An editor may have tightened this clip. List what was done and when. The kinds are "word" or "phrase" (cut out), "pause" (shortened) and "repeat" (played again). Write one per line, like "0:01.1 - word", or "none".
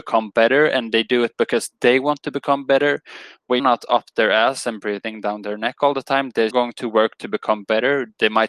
0:03.6 - word
0:06.5 - word